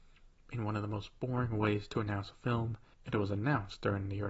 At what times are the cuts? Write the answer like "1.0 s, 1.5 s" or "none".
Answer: none